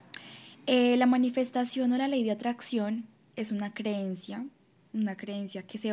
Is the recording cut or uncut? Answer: uncut